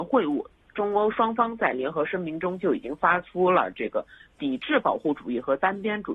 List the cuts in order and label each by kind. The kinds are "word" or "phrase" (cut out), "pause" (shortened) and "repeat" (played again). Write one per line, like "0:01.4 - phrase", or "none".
none